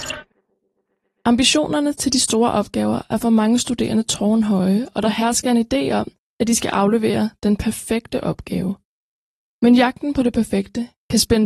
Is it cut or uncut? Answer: uncut